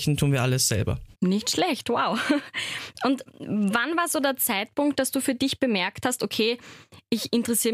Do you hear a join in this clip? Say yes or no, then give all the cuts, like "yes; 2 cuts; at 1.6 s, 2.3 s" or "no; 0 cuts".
yes; 1 cut; at 1.1 s